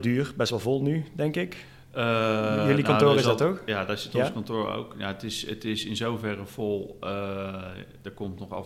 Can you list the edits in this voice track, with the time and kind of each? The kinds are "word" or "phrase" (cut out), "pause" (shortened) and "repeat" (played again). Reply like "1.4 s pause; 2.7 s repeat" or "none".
none